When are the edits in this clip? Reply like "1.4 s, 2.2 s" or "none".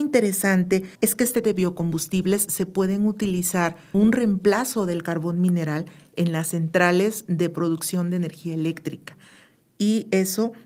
0.9 s, 1.4 s, 3.9 s